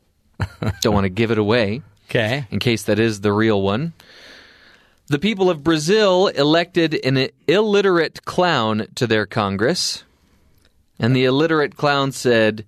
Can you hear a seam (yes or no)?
no